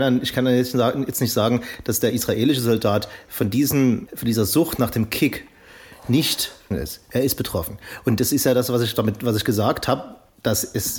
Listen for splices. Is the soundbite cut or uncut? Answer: cut